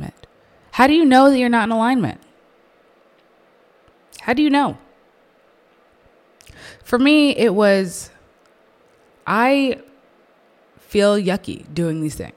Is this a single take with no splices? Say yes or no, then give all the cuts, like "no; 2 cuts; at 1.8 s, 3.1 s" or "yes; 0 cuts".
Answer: yes; 0 cuts